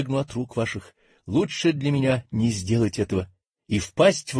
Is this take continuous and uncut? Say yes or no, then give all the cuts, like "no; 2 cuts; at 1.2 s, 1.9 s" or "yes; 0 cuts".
yes; 0 cuts